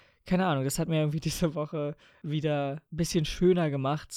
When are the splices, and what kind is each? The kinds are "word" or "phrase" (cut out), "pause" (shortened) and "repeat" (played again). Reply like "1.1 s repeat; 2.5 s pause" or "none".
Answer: none